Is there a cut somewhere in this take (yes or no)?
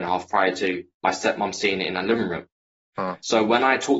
no